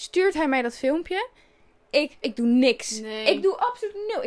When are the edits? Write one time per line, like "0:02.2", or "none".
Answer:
0:02.2